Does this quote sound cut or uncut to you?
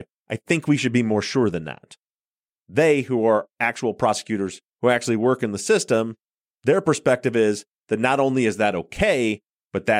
uncut